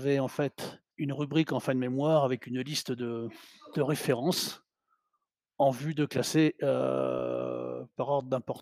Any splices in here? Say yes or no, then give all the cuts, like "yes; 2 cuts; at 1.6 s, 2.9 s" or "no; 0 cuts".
yes; 1 cut; at 0.9 s